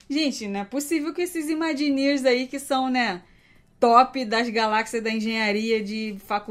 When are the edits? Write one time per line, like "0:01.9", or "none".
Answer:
none